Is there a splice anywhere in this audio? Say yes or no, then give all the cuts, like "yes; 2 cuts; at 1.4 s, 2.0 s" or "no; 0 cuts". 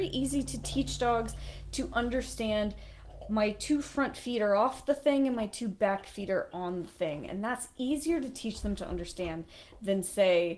no; 0 cuts